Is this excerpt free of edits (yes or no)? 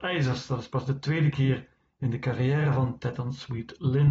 yes